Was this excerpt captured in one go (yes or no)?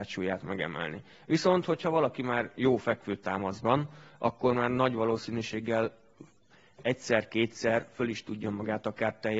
yes